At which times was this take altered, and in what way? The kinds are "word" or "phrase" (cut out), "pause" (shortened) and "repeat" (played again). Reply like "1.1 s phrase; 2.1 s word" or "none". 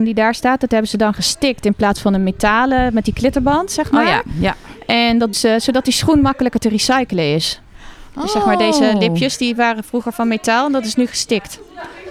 5.3 s word